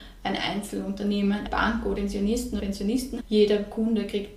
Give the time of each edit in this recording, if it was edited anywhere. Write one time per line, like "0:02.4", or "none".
0:01.5
0:02.0
0:02.6
0:03.2